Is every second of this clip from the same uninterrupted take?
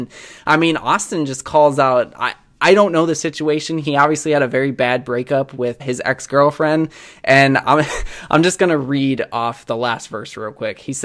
no; 1 cut; at 5.8 s

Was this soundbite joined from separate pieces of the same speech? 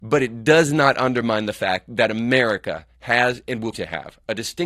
yes; 1 cut; at 3.7 s

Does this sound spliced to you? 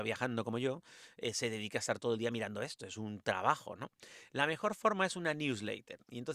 no; 0 cuts

